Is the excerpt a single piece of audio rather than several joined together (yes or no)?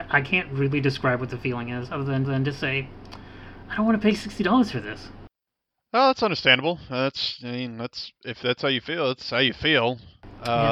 no